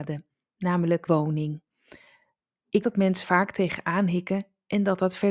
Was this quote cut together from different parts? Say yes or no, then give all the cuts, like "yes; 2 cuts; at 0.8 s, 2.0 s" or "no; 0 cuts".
yes; 3 cuts; at 1.1 s, 2.8 s, 3.2 s